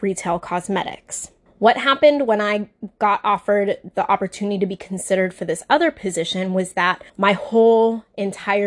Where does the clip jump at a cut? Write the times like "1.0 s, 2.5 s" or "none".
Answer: 1.5 s, 7.1 s